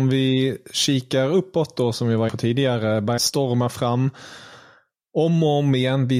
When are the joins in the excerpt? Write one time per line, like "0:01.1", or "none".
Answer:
0:02.3
0:03.2